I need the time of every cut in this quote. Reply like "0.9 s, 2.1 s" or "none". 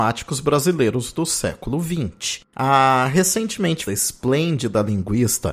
2.5 s, 3.9 s